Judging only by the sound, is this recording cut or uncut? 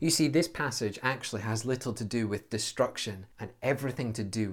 cut